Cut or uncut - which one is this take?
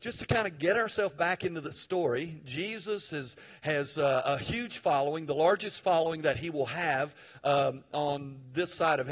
uncut